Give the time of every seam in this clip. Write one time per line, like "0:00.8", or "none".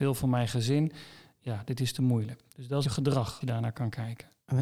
0:02.8
0:03.4